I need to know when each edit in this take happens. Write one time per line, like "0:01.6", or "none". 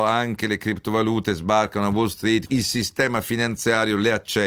0:02.5